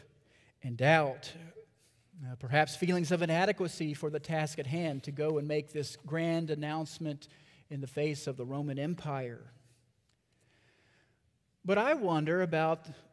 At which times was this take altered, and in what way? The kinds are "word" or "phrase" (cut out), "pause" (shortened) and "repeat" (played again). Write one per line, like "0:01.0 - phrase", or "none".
none